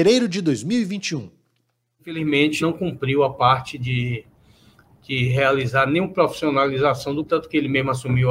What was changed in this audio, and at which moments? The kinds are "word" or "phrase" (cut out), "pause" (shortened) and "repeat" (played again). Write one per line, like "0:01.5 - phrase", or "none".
0:02.6 - word
0:07.3 - word